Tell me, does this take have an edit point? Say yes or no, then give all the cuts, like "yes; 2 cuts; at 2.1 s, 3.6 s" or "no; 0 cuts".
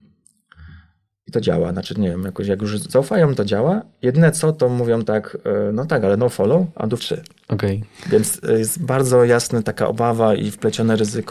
yes; 1 cut; at 7.0 s